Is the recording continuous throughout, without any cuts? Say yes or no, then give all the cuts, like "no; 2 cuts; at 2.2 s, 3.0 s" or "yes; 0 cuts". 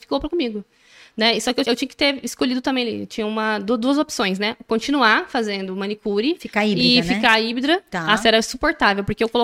no; 1 cut; at 1.6 s